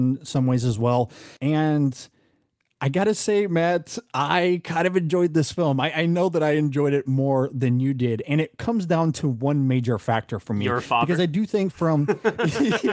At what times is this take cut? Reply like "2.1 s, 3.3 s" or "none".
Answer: 1.4 s